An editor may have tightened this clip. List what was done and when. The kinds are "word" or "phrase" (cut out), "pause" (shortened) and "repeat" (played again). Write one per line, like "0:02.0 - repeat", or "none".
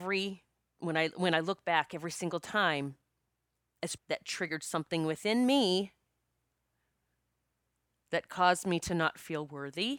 0:04.0 - phrase

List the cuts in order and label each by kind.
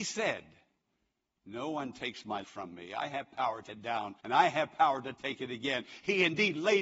0:02.4 - word
0:03.7 - word
0:04.2 - pause

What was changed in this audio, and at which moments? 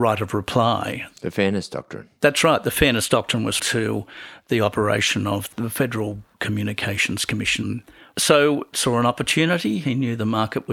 0:03.6 - word
0:08.7 - word

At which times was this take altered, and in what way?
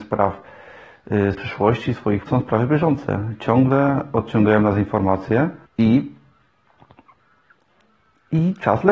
0:01.3 - word
0:02.3 - phrase
0:05.7 - pause

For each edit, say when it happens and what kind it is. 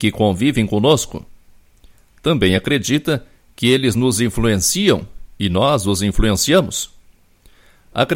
none

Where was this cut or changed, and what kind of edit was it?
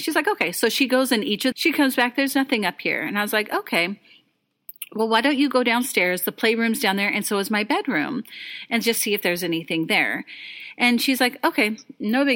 0:01.5 - phrase

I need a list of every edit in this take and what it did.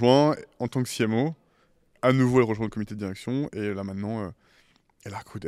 none

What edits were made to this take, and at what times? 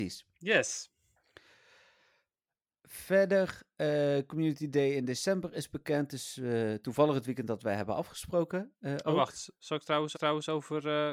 0:10.1 - repeat

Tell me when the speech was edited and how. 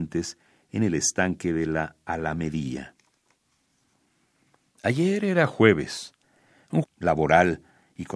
0:06.8 - phrase

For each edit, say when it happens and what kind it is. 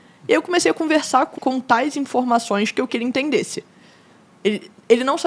0:01.4 - word
0:02.9 - word

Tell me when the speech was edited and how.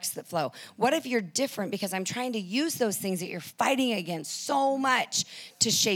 none

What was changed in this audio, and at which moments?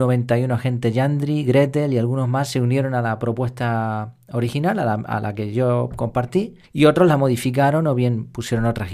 0:06.6 - pause

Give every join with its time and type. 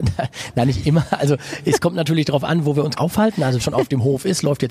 0:03.0 - word
0:03.6 - word

